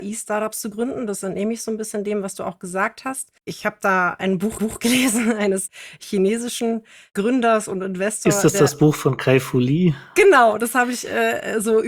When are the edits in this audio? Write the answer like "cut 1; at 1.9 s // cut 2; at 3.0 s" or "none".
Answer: cut 1; at 3.4 s // cut 2; at 4.6 s